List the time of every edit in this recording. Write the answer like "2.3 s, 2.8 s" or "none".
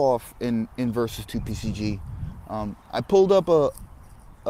2.8 s